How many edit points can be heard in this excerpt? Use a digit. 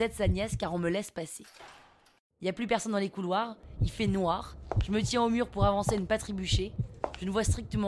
0